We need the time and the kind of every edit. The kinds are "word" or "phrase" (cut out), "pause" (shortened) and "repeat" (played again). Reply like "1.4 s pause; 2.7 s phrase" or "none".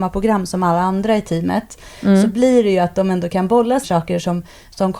3.8 s word